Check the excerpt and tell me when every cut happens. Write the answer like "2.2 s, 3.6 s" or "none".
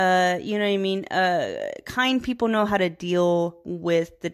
none